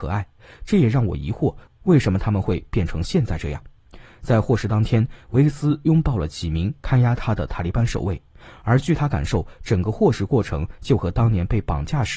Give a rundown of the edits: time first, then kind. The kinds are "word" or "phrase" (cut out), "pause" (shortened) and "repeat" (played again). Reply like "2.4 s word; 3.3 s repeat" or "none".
none